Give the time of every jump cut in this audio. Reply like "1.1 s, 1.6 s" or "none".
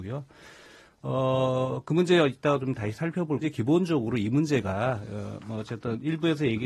3.4 s